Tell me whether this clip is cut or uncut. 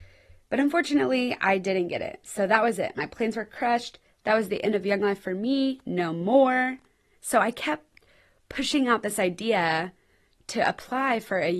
uncut